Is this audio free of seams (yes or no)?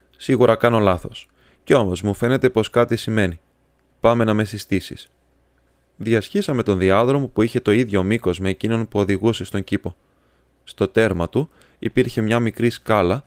yes